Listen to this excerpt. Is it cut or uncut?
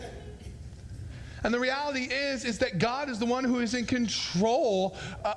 uncut